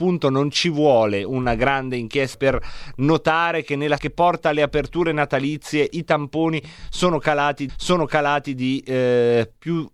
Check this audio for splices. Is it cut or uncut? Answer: cut